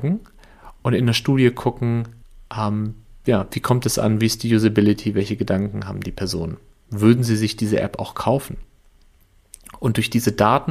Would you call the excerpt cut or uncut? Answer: cut